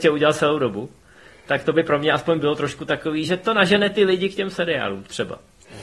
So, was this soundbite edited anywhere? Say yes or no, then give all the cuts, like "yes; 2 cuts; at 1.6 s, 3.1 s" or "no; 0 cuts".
no; 0 cuts